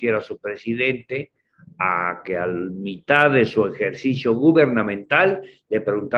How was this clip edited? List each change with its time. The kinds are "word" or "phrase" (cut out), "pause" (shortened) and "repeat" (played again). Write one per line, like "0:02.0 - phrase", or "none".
none